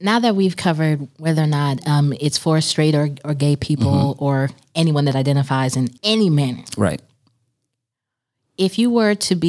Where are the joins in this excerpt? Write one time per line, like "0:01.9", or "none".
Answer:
0:06.0